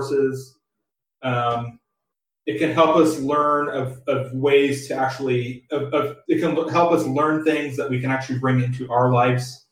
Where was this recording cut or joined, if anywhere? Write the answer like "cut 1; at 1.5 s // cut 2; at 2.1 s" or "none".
none